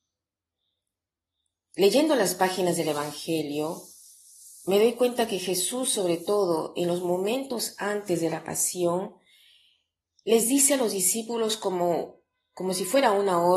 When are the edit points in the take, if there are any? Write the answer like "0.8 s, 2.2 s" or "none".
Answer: none